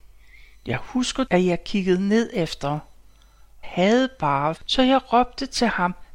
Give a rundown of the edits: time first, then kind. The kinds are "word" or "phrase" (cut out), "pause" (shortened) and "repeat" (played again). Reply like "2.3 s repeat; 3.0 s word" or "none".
1.3 s word; 3.6 s phrase; 4.6 s word